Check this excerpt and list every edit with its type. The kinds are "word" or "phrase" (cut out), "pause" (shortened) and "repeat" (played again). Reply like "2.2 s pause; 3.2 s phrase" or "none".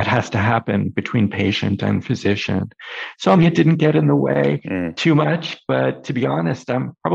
3.4 s word